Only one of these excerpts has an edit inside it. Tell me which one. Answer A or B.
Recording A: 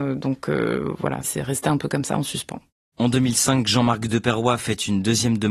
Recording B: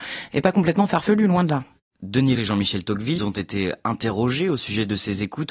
B